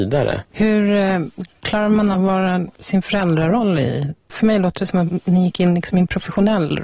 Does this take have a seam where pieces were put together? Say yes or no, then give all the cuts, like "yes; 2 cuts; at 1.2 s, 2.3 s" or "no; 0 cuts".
yes; 3 cuts; at 2.1 s, 2.7 s, 5.1 s